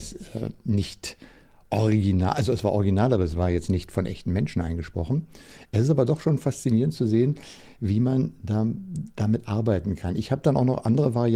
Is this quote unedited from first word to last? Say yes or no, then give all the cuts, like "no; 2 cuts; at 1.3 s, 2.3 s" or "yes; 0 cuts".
yes; 0 cuts